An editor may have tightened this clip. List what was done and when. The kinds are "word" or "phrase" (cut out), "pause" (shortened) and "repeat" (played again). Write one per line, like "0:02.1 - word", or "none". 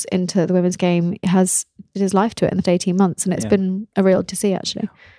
0:01.2 - word
0:01.9 - word
0:02.6 - word
0:04.2 - word